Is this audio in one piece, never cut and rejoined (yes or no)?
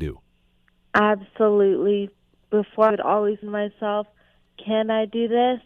no